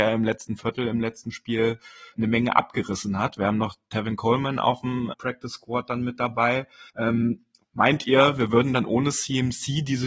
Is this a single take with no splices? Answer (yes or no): no